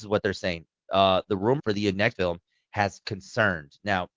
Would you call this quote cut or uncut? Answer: cut